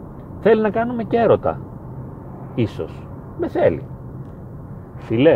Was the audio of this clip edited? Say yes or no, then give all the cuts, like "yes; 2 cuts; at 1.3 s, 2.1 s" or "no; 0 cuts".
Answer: no; 0 cuts